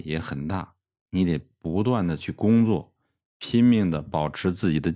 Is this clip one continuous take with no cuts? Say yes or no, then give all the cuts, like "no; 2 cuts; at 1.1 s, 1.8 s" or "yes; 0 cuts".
yes; 0 cuts